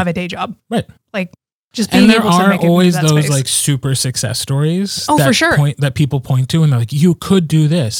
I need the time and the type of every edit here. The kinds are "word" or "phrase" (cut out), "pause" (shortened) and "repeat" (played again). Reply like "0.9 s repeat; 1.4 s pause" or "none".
none